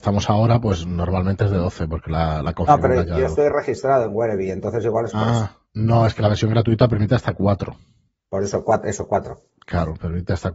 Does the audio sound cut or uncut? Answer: uncut